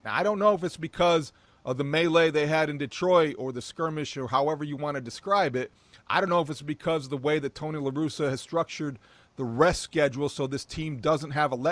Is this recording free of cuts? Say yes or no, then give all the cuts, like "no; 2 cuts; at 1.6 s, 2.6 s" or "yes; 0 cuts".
yes; 0 cuts